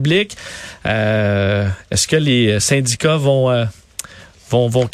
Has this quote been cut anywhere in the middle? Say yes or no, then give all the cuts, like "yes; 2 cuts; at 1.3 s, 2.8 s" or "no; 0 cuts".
no; 0 cuts